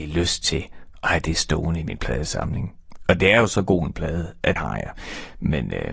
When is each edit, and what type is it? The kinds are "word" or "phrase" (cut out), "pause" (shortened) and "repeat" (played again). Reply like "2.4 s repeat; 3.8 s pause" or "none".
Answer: 4.6 s word